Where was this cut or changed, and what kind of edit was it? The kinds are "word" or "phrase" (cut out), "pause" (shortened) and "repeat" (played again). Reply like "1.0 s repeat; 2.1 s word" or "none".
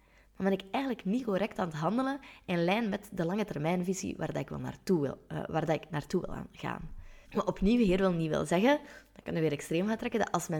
7.2 s pause